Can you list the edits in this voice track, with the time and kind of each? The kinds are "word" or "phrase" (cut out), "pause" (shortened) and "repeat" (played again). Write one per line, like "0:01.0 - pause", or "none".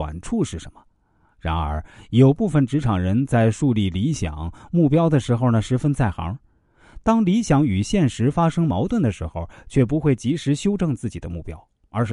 none